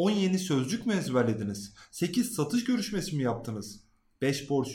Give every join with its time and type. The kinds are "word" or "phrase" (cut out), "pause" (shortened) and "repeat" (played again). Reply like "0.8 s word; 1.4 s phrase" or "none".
none